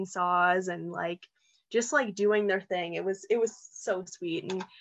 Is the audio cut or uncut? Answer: uncut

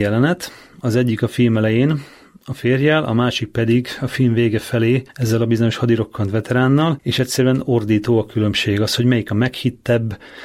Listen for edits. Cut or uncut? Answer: uncut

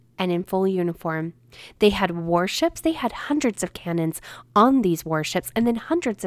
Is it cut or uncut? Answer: uncut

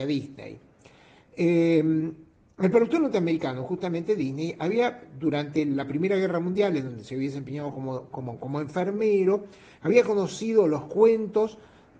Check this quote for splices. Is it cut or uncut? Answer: uncut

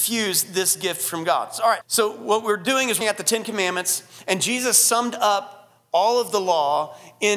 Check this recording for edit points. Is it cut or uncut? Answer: cut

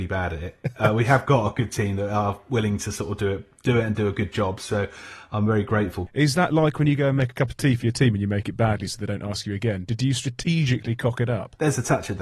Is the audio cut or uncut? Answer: uncut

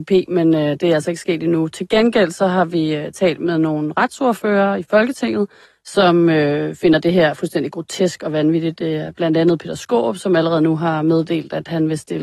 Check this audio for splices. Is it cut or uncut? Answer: cut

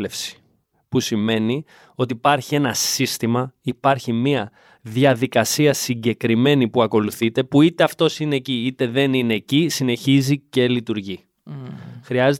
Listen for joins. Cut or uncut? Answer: uncut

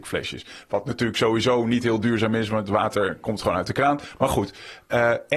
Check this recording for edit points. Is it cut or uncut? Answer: uncut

